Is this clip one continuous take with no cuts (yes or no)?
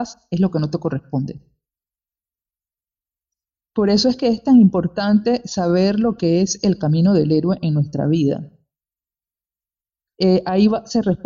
yes